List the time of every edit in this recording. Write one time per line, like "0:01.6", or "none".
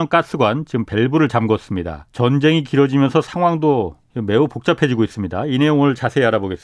0:02.1
0:04.0